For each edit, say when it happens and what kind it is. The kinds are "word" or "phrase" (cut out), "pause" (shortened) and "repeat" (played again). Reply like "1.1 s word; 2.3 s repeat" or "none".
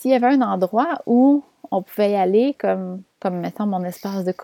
3.1 s pause